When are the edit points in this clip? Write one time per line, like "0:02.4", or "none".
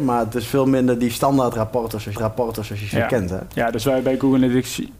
0:02.2